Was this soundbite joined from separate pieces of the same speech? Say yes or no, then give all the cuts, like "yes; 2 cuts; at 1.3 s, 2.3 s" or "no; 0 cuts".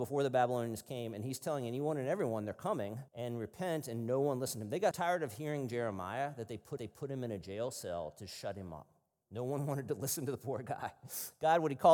yes; 3 cuts; at 3.1 s, 4.9 s, 6.8 s